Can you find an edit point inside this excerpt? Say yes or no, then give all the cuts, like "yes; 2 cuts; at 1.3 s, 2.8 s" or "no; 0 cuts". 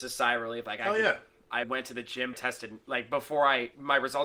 yes; 2 cuts; at 1.6 s, 2.3 s